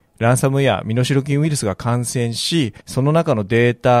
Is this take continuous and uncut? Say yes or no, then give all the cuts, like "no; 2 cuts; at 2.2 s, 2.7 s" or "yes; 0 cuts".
no; 1 cut; at 2.8 s